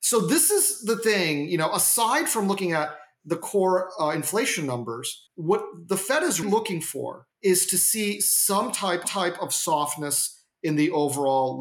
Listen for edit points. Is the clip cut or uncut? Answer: cut